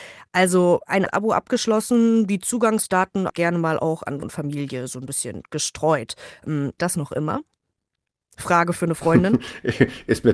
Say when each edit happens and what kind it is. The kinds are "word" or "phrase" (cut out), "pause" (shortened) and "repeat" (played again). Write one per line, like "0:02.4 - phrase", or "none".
0:01.1 - word
0:03.3 - word
0:04.2 - word
0:06.8 - word